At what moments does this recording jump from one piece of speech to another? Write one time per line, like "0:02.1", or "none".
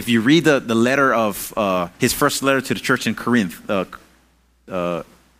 0:01.9